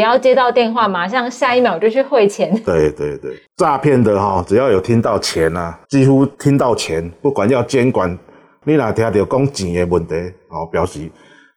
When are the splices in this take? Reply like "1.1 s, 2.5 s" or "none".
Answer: 3.4 s, 5.8 s, 6.3 s